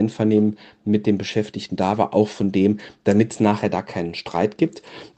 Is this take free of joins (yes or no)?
yes